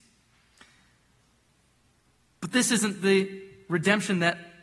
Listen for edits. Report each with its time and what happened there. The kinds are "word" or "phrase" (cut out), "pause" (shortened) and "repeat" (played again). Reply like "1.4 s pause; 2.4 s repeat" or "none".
none